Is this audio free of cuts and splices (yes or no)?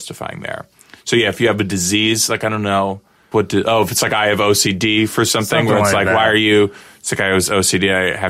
no